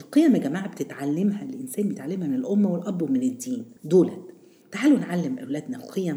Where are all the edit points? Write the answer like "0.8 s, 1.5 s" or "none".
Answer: 3.8 s